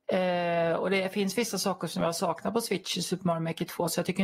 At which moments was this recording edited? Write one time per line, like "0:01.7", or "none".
none